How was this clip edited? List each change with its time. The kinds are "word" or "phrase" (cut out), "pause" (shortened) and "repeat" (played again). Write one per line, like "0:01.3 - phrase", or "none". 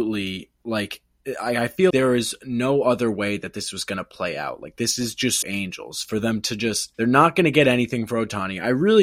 0:01.9 - word
0:05.4 - word
0:06.9 - pause